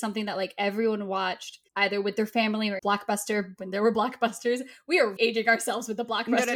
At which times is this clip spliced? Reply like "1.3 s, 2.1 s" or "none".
1.7 s, 2.8 s, 5.2 s